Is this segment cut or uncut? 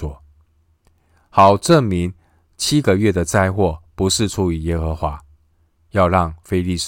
uncut